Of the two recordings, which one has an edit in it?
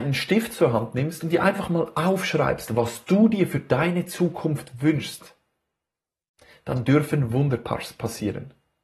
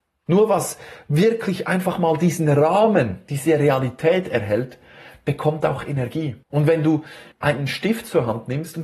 second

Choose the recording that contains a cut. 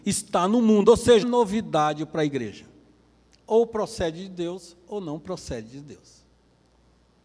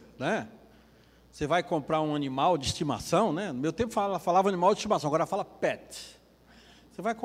first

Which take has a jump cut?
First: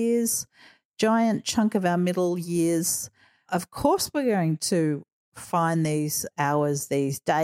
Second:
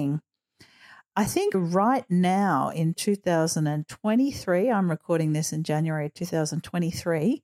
second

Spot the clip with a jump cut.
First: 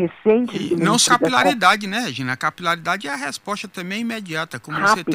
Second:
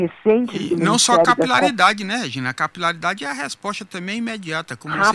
first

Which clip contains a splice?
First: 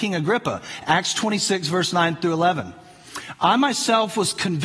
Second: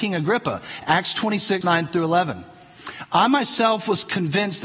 second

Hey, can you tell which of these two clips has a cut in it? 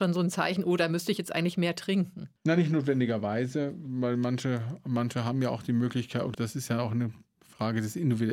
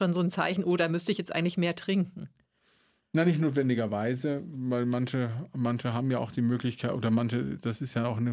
first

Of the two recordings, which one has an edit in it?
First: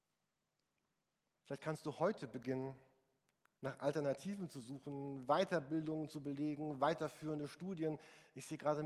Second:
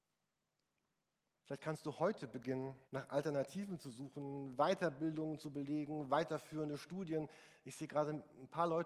second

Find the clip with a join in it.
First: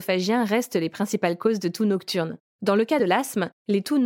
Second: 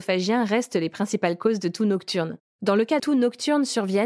second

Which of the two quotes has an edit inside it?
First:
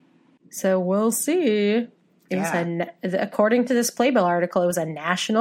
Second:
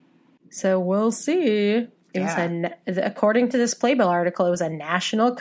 second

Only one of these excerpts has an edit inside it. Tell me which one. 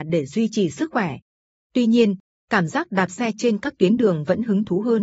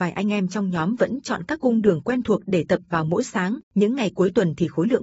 second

